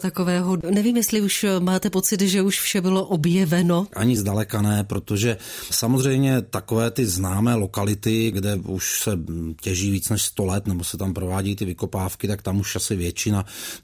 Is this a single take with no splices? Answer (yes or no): yes